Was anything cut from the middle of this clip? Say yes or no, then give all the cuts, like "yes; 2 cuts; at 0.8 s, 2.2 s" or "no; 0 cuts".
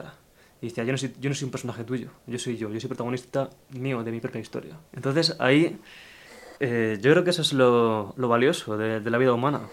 yes; 3 cuts; at 2.2 s, 4.9 s, 6.6 s